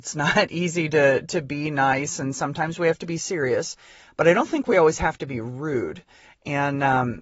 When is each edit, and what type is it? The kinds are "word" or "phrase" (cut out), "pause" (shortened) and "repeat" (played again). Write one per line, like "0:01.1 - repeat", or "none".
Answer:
none